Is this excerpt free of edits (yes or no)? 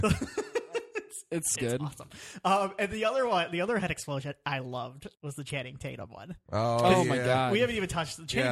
no